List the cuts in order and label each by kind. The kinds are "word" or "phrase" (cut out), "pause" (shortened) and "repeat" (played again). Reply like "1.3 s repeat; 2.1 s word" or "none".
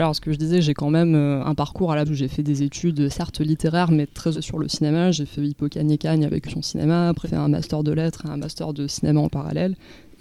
1.4 s word; 2.1 s word; 4.3 s word; 5.4 s word; 6.4 s word; 7.2 s word